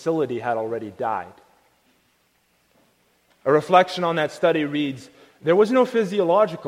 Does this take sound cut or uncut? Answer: uncut